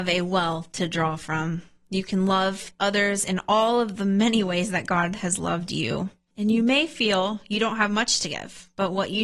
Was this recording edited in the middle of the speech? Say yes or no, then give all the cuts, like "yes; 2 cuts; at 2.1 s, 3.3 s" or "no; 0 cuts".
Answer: no; 0 cuts